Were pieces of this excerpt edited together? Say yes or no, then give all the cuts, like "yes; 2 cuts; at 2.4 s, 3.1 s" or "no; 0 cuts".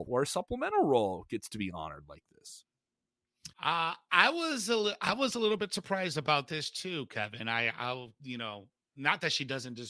yes; 1 cut; at 3.5 s